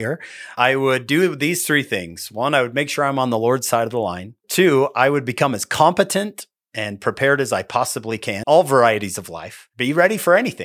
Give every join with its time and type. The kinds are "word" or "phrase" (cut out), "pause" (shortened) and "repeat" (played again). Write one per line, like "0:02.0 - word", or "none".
0:08.4 - word